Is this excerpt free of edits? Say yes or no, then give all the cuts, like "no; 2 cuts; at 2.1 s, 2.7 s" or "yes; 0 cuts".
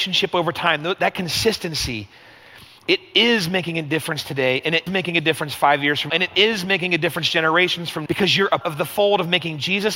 no; 4 cuts; at 4.9 s, 6.1 s, 8.1 s, 8.6 s